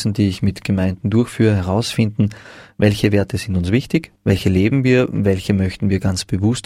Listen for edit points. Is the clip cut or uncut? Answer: cut